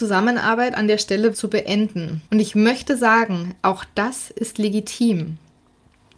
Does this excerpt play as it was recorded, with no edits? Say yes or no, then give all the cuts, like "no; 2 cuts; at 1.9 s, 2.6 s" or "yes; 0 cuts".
no; 2 cuts; at 1.3 s, 2.3 s